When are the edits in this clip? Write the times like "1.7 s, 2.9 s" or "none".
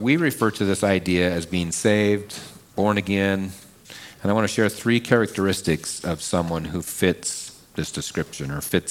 2.6 s